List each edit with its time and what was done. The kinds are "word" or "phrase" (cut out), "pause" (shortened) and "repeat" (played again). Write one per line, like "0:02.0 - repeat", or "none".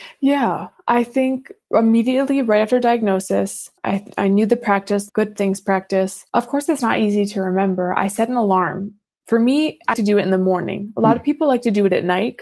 0:03.8 - pause
0:05.1 - phrase
0:06.3 - pause
0:09.9 - word